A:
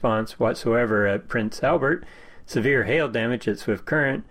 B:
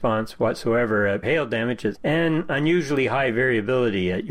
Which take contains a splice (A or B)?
B